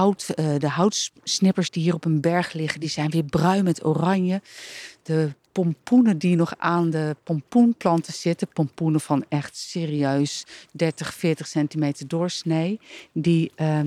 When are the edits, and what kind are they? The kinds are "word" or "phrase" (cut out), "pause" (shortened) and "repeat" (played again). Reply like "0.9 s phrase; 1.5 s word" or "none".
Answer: none